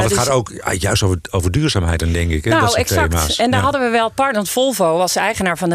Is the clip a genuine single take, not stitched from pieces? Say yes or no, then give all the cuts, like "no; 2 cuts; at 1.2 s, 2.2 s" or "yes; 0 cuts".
yes; 0 cuts